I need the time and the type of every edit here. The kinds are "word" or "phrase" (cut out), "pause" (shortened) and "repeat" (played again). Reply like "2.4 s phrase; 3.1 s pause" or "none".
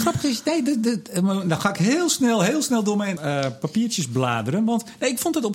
3.2 s phrase